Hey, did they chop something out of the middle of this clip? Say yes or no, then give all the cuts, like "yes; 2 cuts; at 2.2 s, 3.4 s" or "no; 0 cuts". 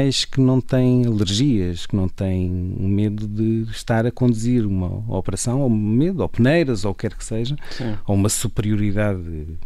no; 0 cuts